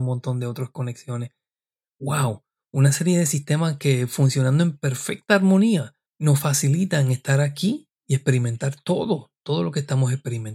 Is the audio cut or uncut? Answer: uncut